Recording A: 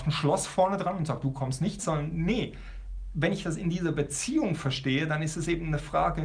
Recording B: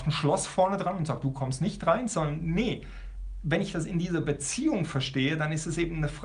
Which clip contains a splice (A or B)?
A